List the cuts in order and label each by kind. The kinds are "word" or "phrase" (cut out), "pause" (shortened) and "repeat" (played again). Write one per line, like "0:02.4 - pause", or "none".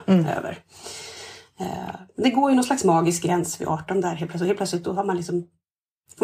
none